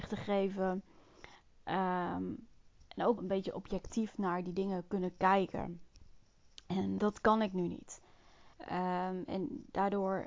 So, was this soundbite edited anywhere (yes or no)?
yes